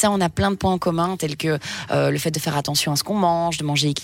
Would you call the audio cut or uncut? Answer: uncut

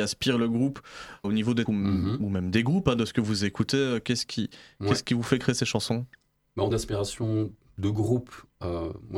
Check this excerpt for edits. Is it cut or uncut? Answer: cut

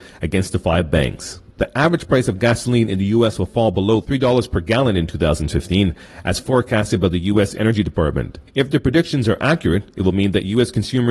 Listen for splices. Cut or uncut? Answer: cut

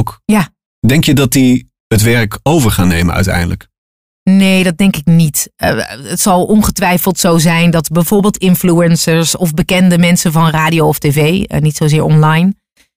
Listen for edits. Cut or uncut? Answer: uncut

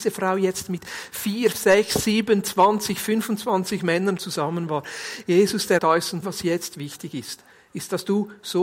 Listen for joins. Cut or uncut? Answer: cut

